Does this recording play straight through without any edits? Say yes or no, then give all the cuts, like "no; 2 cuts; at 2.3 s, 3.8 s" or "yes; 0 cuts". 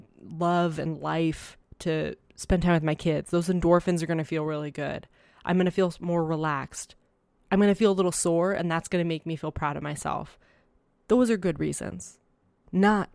yes; 0 cuts